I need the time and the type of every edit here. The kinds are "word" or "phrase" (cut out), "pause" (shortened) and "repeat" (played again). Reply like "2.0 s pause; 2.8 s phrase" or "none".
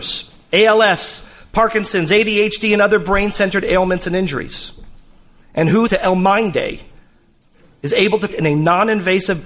5.9 s word; 8.3 s word